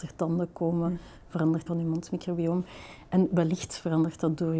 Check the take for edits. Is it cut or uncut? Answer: cut